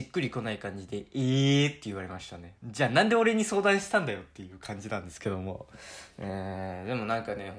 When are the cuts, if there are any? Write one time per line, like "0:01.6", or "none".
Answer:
0:02.6